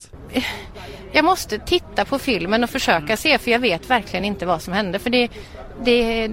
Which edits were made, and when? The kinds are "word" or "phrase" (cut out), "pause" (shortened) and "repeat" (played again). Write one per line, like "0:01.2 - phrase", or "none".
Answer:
none